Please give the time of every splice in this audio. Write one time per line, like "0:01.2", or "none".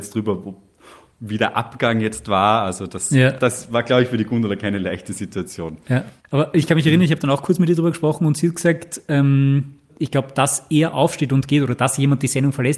0:06.2